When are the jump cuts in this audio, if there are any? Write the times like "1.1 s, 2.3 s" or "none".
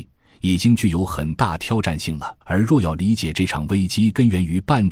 2.4 s